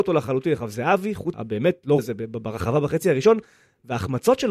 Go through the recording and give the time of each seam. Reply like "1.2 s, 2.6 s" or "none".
1.3 s, 2.0 s